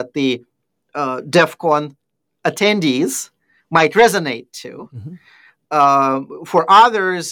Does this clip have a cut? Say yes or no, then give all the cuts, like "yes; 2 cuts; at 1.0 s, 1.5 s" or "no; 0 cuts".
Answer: no; 0 cuts